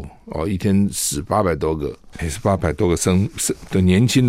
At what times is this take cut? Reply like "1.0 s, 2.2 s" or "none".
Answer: 2.2 s